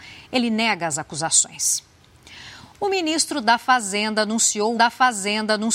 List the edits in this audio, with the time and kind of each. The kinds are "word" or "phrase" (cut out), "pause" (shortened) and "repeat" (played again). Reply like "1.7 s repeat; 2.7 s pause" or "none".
4.7 s repeat